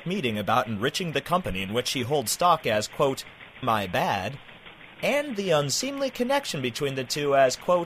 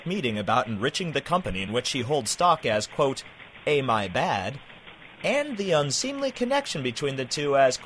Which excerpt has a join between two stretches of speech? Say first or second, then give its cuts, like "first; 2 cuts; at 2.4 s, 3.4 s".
first; 1 cut; at 3.6 s